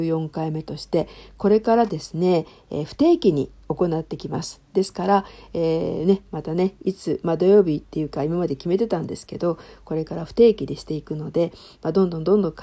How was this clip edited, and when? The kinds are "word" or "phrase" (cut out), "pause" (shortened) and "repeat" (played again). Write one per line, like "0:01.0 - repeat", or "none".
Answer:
none